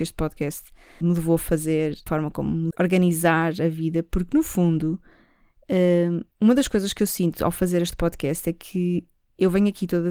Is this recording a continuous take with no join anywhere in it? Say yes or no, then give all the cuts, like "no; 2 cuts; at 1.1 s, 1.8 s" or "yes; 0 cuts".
no; 4 cuts; at 1.0 s, 2.1 s, 2.7 s, 6.3 s